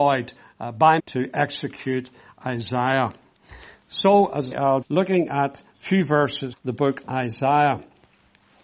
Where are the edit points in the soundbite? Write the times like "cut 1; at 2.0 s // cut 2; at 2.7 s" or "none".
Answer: cut 1; at 1.0 s // cut 2; at 4.5 s // cut 3; at 4.8 s // cut 4; at 5.7 s // cut 5; at 6.5 s // cut 6; at 7.0 s